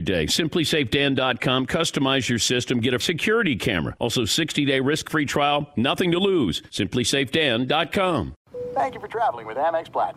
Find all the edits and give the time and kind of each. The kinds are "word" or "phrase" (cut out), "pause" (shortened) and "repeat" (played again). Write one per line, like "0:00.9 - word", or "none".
0:03.0 - word